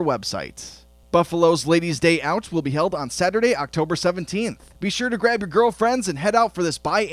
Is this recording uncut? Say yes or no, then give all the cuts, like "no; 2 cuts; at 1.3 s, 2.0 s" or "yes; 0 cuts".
yes; 0 cuts